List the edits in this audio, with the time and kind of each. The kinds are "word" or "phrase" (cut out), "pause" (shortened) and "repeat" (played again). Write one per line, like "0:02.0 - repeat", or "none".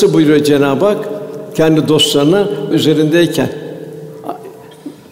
0:02.7 - phrase